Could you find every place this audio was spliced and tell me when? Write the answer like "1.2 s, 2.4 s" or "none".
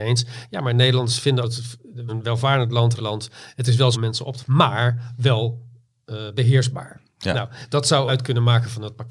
1.4 s, 2.1 s, 3.0 s, 3.9 s, 4.4 s, 8.1 s